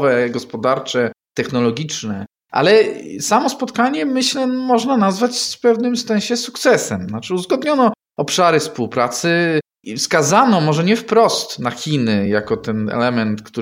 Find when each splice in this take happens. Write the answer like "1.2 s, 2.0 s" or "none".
none